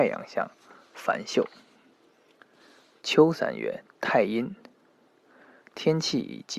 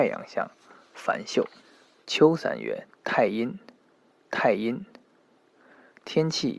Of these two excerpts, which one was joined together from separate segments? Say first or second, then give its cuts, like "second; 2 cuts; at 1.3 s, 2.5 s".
second; 2 cuts; at 1.6 s, 4.2 s